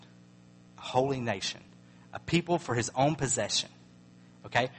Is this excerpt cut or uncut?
uncut